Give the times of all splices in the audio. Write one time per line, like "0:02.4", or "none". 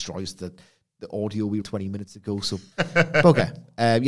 0:01.6
0:02.7